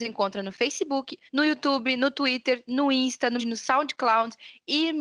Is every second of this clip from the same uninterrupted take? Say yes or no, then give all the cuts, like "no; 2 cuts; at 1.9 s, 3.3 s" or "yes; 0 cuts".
no; 2 cuts; at 1.3 s, 3.4 s